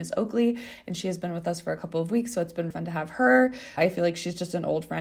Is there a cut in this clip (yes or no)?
yes